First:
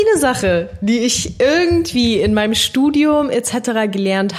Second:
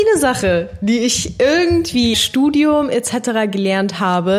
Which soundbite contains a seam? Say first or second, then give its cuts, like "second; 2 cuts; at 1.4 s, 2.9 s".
second; 1 cut; at 2.1 s